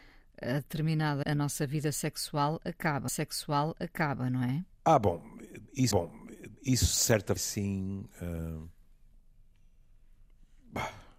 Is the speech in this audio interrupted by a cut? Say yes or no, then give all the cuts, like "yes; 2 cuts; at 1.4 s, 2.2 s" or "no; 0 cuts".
yes; 5 cuts; at 1.2 s, 3.1 s, 4.7 s, 5.9 s, 7.4 s